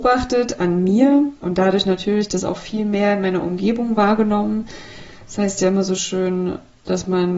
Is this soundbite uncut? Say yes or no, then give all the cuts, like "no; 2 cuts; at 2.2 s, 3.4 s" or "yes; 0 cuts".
no; 1 cut; at 1.4 s